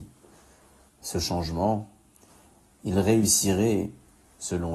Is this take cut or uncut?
uncut